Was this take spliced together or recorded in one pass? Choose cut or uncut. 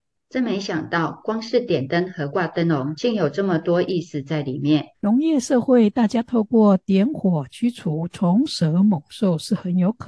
cut